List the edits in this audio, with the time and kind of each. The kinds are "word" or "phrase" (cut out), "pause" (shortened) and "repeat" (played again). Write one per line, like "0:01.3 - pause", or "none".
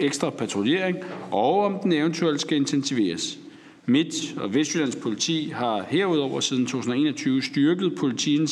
none